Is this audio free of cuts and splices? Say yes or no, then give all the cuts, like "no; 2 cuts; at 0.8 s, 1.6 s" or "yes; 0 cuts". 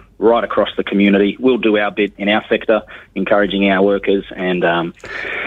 no; 1 cut; at 2.1 s